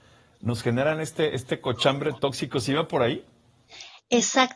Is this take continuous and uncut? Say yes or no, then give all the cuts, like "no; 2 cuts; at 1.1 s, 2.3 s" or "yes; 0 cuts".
yes; 0 cuts